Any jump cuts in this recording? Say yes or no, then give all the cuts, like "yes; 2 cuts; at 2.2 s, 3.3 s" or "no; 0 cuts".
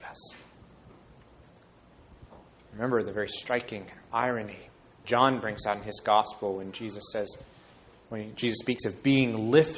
yes; 1 cut; at 5.0 s